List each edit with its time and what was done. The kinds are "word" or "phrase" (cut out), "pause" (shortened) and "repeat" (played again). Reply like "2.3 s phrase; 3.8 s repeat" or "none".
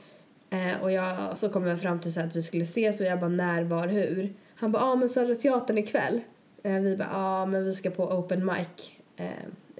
6.4 s pause